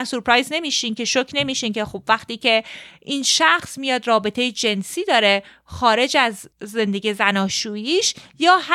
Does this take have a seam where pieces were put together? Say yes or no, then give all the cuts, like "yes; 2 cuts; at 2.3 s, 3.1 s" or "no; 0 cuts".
yes; 1 cut; at 6.5 s